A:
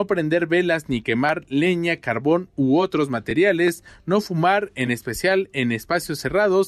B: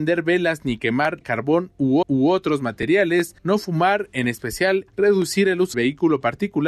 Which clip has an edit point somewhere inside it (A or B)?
B